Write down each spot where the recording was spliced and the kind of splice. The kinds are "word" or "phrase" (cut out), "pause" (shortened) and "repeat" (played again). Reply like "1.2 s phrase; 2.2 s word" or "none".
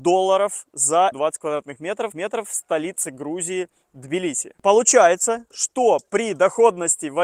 1.1 s phrase; 2.1 s repeat